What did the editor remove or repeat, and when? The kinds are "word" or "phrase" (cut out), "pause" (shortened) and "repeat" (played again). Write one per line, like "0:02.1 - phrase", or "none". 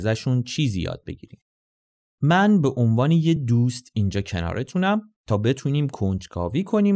none